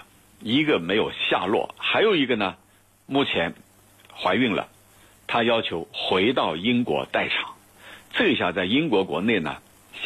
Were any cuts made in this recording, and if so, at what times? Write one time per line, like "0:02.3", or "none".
none